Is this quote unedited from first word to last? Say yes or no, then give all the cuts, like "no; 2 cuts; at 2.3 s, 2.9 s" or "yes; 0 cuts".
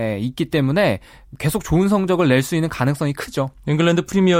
yes; 0 cuts